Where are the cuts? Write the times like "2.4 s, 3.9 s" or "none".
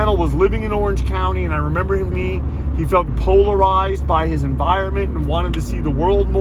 2.1 s, 3.1 s